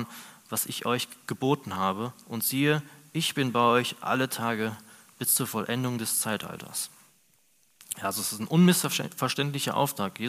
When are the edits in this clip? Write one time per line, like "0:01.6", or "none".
none